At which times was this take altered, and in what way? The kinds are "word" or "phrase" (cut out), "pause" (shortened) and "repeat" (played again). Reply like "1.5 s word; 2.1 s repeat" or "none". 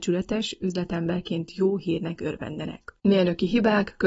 none